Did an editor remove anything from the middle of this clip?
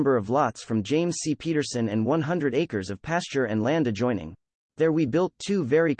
no; 0 cuts

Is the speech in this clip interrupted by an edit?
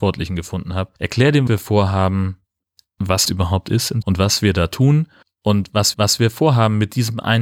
yes; 6 cuts; at 1.0 s, 1.5 s, 3.2 s, 4.0 s, 5.2 s, 5.9 s

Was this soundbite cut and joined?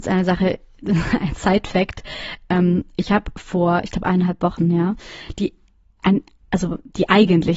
no; 0 cuts

